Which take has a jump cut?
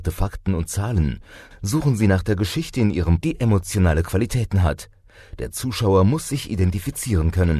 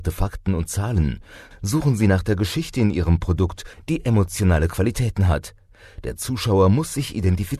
first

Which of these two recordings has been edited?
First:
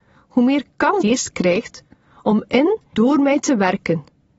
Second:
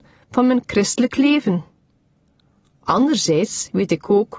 first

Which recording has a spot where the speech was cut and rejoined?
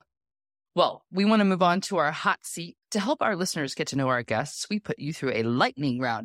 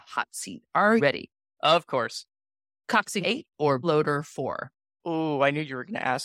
second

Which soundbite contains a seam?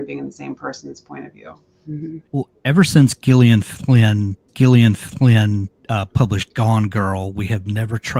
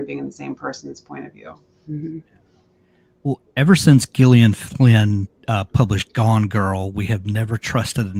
first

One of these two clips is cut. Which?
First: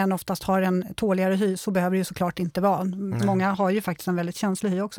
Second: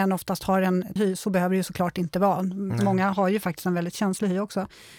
second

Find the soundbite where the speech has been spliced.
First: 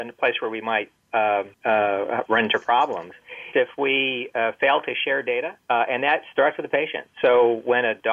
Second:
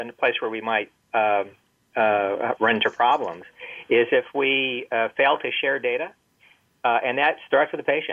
first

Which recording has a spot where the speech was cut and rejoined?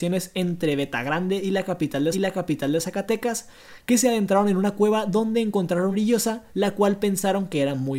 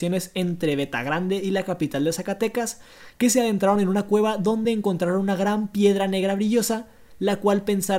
first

